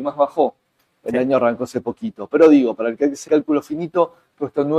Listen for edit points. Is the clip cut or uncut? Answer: cut